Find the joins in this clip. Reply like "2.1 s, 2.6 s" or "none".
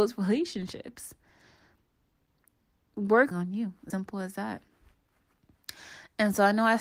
3.3 s, 3.9 s